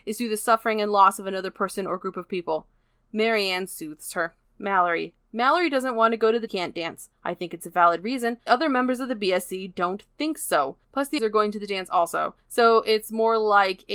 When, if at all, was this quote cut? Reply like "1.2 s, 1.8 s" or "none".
6.5 s, 7.1 s, 8.5 s, 10.8 s, 11.2 s, 12.4 s